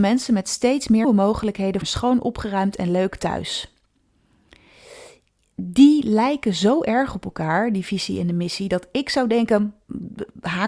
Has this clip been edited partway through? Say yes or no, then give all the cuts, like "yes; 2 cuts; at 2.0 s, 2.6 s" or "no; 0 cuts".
yes; 2 cuts; at 1.0 s, 1.8 s